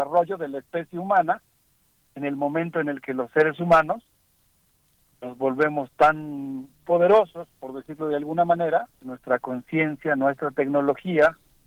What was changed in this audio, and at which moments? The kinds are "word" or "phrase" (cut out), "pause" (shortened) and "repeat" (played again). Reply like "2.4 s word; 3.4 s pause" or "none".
8.9 s pause